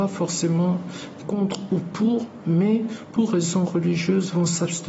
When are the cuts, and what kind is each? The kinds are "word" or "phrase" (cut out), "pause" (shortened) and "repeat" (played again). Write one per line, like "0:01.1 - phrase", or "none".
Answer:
0:01.2 - word